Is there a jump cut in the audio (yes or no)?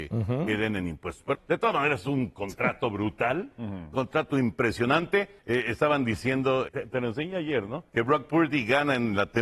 yes